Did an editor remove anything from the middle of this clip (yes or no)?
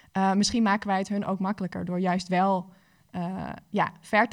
no